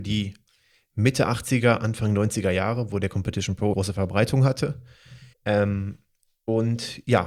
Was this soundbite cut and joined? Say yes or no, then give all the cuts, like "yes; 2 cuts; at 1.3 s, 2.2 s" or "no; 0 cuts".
yes; 2 cuts; at 3.7 s, 5.3 s